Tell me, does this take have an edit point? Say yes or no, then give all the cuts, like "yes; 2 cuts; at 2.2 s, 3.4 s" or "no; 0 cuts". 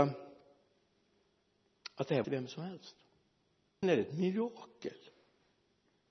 yes; 2 cuts; at 2.2 s, 3.8 s